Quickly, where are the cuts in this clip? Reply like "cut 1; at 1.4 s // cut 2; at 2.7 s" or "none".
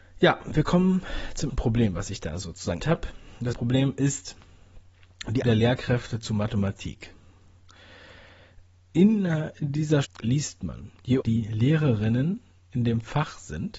cut 1; at 1.5 s // cut 2; at 2.8 s // cut 3; at 3.5 s // cut 4; at 5.4 s // cut 5; at 10.0 s // cut 6; at 11.2 s